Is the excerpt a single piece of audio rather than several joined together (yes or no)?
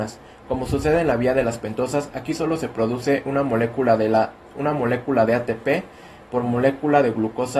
yes